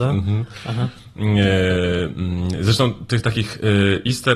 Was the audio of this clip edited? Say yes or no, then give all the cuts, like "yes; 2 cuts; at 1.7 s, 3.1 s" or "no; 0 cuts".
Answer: no; 0 cuts